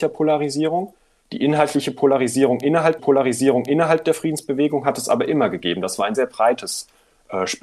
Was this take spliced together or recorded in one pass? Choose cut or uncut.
cut